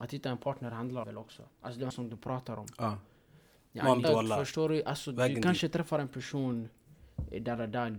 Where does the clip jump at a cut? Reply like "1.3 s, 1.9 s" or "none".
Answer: 1.0 s, 1.5 s, 1.9 s, 4.0 s